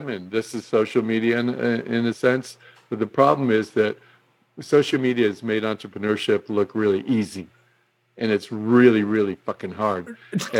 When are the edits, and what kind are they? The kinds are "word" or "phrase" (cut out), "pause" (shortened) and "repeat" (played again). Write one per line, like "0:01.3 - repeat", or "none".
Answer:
none